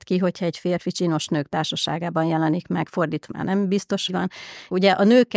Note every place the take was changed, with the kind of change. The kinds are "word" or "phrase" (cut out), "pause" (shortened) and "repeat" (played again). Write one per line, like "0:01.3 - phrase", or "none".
0:03.3 - word
0:04.1 - phrase